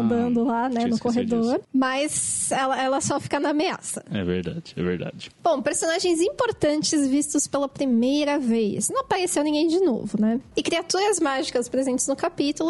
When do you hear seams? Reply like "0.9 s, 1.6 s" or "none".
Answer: 5.4 s